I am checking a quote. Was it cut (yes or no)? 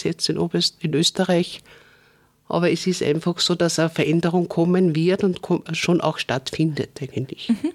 no